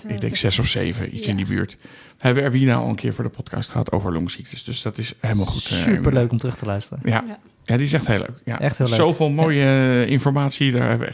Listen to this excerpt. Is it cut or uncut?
uncut